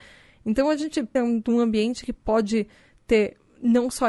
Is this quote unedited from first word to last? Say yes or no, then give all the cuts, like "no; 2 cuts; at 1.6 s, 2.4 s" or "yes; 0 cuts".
no; 1 cut; at 1.1 s